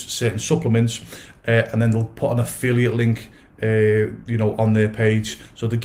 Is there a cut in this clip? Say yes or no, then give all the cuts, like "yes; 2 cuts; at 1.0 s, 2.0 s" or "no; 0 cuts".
no; 0 cuts